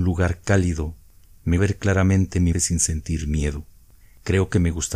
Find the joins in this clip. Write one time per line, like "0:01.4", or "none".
0:01.6
0:02.5